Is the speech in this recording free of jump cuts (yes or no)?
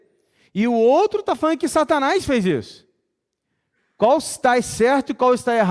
yes